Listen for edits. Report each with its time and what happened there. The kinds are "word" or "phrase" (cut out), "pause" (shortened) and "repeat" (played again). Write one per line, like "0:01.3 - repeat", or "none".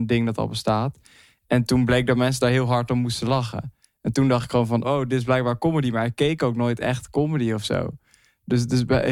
0:04.8 - word